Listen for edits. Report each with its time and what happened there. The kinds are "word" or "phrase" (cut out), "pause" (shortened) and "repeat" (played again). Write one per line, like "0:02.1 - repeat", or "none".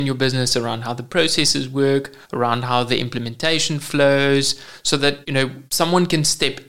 0:02.2 - pause
0:05.2 - pause
0:05.7 - pause